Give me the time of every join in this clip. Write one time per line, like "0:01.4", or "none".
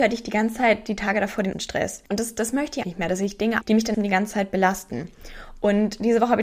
0:01.5
0:02.1
0:02.8
0:03.6
0:03.9

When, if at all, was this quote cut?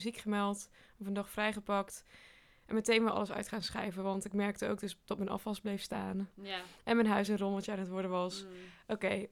none

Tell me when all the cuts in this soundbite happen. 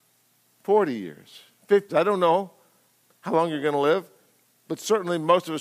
0:01.9

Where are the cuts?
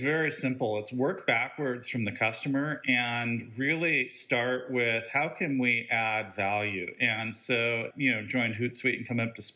0:07.9

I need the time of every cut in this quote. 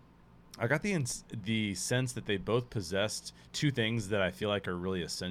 none

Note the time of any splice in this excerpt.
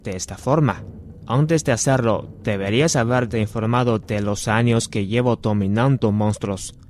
none

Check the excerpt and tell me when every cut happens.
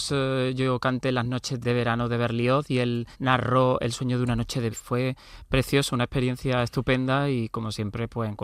0:01.6
0:03.1
0:04.7

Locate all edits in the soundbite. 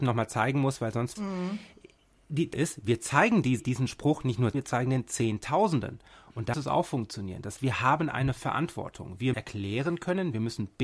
0:01.2
0:02.5
0:03.6
0:04.5
0:06.5
0:07.6
0:09.3

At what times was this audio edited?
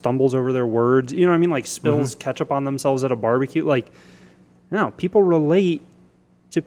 none

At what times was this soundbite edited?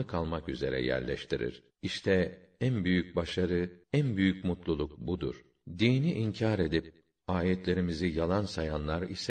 0:01.7
0:03.8

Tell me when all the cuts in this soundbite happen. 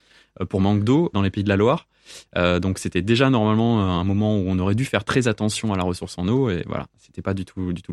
0:01.1

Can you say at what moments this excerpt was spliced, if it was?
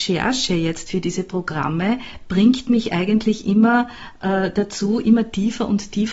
none

